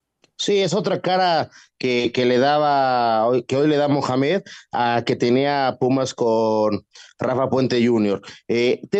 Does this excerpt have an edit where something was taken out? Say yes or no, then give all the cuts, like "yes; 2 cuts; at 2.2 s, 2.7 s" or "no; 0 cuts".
no; 0 cuts